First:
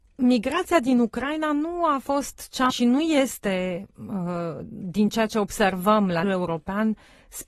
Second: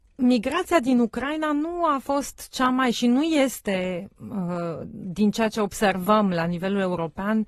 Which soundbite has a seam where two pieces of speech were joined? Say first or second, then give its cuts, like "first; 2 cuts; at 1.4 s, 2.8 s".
first; 2 cuts; at 2.7 s, 6.2 s